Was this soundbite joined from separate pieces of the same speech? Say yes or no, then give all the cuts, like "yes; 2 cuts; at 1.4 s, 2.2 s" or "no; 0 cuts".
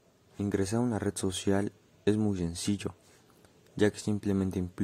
no; 0 cuts